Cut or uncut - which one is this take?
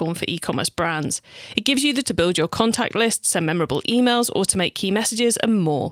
cut